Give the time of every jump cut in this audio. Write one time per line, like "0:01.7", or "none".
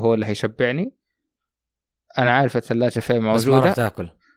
none